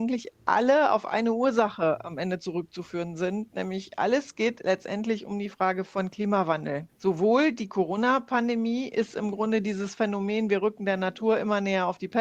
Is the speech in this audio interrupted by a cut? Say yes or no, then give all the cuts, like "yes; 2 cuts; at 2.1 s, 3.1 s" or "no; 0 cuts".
yes; 1 cut; at 6.9 s